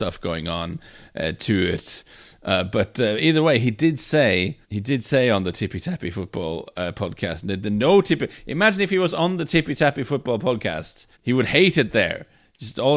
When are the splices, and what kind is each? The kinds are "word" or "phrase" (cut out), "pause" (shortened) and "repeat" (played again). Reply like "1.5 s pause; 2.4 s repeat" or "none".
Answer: 4.6 s pause; 11.1 s pause